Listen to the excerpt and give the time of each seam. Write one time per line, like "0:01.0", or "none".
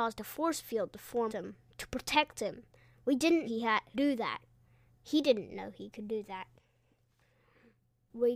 0:01.3
0:03.4
0:03.9